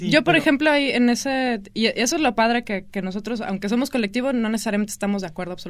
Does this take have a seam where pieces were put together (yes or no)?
no